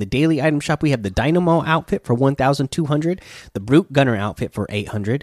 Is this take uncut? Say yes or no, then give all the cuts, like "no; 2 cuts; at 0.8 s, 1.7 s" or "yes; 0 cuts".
yes; 0 cuts